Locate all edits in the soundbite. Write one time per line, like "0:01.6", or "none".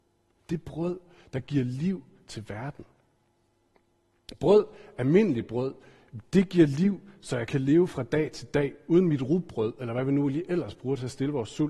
none